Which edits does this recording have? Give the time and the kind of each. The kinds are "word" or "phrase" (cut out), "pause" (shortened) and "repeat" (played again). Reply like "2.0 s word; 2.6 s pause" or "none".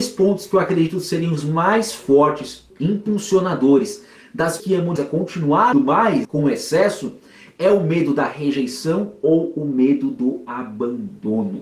4.6 s word; 5.0 s word; 5.7 s word; 6.2 s word